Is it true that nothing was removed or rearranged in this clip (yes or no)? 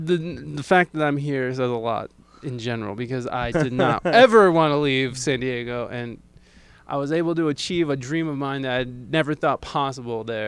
no